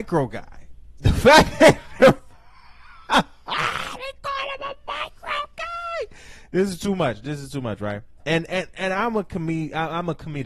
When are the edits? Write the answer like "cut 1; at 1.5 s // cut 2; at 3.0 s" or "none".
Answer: none